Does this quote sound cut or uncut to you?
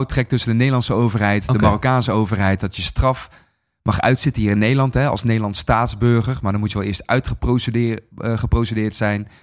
uncut